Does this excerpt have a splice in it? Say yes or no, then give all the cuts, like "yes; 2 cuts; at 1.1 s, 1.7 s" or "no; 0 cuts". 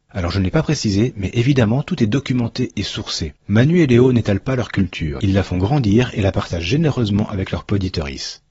yes; 1 cut; at 3.4 s